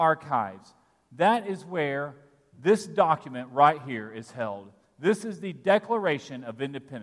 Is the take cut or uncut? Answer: uncut